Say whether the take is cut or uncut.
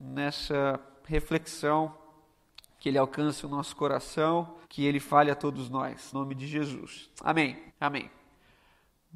cut